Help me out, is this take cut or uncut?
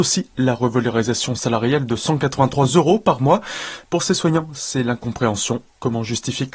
uncut